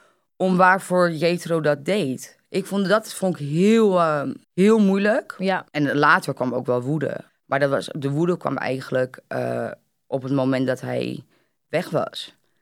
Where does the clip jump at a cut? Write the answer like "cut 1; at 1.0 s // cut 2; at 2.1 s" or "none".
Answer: cut 1; at 4.4 s // cut 2; at 5.7 s // cut 3; at 7.3 s